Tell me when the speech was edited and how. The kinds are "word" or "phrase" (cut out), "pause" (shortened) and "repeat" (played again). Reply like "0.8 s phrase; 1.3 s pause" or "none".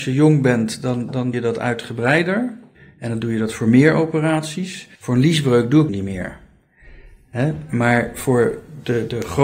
1.3 s word; 2.7 s pause; 5.0 s pause; 5.9 s phrase